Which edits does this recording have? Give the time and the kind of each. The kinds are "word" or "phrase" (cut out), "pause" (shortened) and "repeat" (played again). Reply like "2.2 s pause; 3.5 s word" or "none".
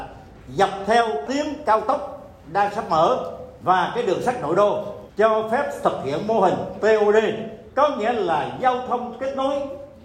1.3 s word